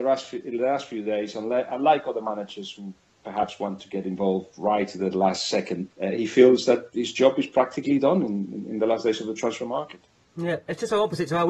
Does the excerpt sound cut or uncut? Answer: cut